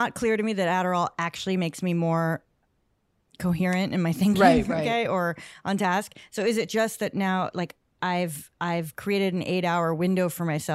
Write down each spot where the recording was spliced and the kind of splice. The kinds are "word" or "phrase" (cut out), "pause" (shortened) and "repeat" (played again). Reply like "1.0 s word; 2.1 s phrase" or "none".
none